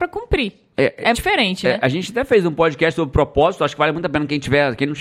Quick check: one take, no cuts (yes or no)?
no